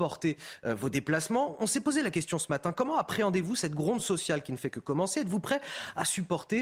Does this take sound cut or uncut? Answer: uncut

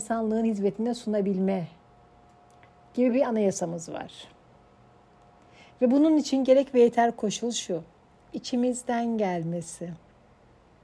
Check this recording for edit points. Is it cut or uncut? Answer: uncut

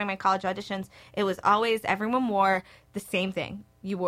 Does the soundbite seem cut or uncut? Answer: uncut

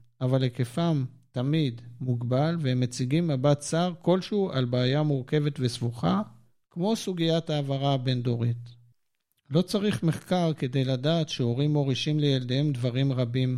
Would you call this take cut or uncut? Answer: uncut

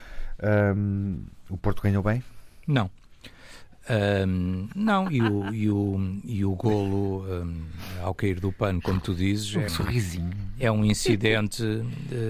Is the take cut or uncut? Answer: cut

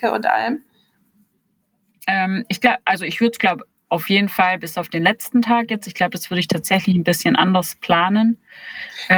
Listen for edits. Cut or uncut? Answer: uncut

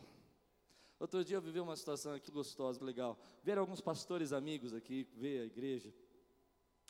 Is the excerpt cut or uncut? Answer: cut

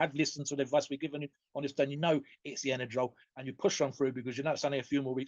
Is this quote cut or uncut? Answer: cut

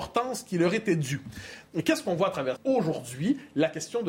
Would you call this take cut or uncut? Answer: cut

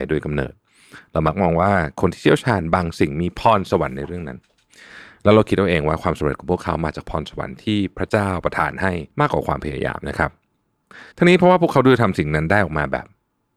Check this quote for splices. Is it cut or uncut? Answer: cut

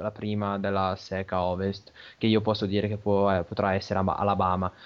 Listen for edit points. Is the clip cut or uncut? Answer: uncut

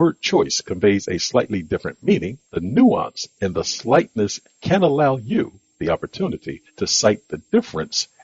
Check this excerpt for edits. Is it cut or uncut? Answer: cut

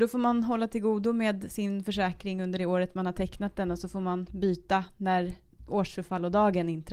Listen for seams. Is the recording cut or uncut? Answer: uncut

